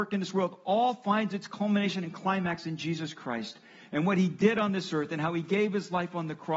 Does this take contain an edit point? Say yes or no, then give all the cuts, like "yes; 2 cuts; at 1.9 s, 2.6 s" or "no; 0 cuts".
no; 0 cuts